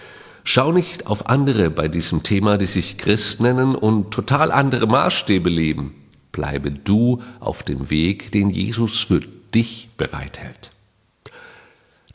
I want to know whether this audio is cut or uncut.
uncut